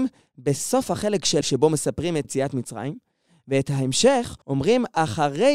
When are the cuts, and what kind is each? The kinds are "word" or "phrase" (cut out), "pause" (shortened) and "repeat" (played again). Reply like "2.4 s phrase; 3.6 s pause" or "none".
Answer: 1.4 s word; 2.2 s word; 4.4 s pause